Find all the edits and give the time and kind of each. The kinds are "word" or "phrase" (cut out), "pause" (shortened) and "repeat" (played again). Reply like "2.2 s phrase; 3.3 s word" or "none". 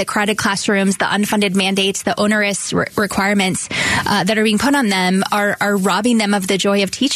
none